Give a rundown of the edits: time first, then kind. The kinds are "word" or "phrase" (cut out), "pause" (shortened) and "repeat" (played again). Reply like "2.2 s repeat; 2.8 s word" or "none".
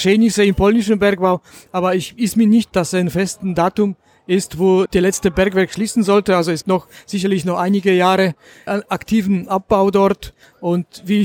2.7 s word; 4.9 s word; 6.6 s word; 8.7 s word